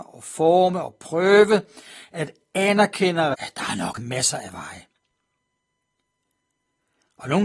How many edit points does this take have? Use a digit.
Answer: 2